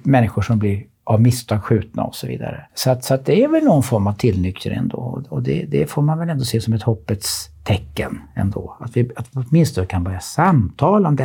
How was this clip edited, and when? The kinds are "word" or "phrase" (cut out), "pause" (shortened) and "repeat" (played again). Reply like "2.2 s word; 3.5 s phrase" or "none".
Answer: 2.7 s pause